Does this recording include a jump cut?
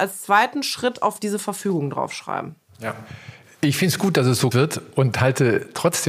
yes; 1 cut; at 4.5 s

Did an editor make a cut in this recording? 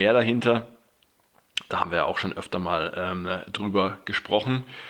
no; 0 cuts

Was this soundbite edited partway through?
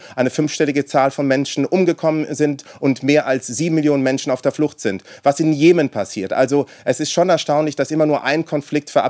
no; 0 cuts

